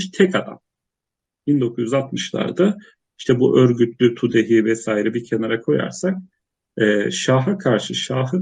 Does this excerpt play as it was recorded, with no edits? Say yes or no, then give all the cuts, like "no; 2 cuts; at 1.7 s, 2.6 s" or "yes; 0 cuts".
yes; 0 cuts